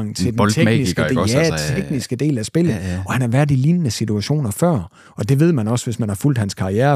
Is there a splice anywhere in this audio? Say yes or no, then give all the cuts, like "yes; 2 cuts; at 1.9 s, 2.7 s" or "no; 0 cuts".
no; 0 cuts